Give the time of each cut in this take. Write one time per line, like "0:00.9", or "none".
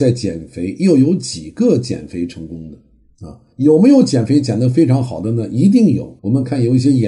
0:06.2